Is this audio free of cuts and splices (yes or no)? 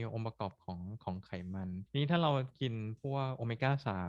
no